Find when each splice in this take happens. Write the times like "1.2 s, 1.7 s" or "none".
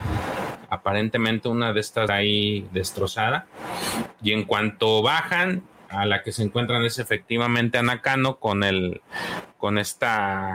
2.1 s